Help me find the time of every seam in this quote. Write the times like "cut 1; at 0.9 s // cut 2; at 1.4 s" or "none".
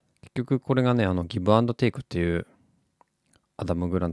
none

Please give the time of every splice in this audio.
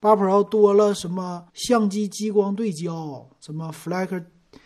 cut 1; at 1.5 s

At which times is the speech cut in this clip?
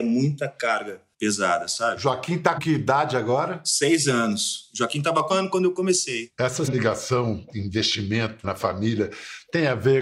cut 1; at 1.1 s // cut 2; at 2.6 s // cut 3; at 5.3 s // cut 4; at 6.7 s // cut 5; at 8.4 s

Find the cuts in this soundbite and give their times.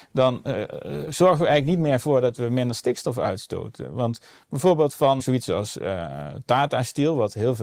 cut 1; at 5.2 s

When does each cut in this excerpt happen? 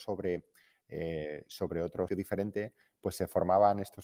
cut 1; at 2.1 s

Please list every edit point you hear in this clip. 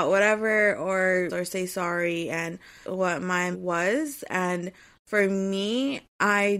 cut 1; at 1.3 s // cut 2; at 2.8 s // cut 3; at 3.5 s

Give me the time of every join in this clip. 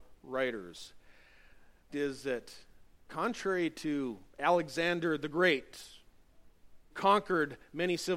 cut 1; at 1.9 s // cut 2; at 6.9 s

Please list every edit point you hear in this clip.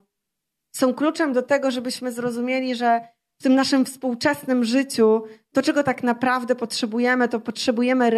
none

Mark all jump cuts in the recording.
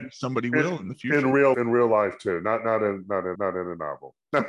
cut 1; at 1.5 s // cut 2; at 3.3 s

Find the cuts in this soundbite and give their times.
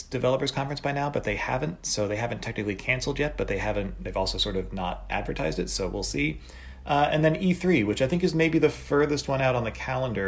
none

